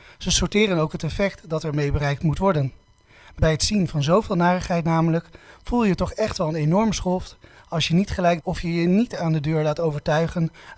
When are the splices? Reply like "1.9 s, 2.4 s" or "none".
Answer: 3.4 s, 8.4 s